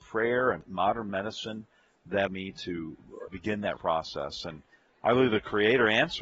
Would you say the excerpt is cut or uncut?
cut